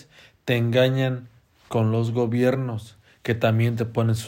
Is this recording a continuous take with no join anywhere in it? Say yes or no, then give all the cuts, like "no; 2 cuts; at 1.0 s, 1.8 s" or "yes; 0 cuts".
yes; 0 cuts